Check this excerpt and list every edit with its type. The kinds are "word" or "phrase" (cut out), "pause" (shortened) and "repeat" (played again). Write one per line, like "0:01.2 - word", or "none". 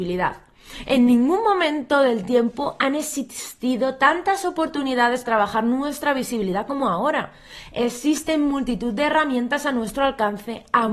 0:05.3 - word